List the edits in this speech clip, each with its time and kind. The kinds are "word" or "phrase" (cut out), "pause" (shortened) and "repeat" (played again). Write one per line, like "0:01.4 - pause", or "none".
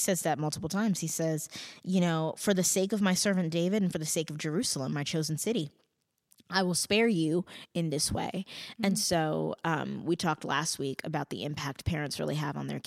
none